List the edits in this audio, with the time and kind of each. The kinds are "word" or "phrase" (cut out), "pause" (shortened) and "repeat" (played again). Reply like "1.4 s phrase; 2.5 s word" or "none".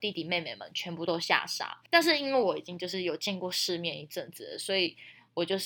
1.9 s pause